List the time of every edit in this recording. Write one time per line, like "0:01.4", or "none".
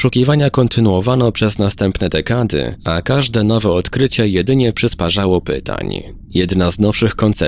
none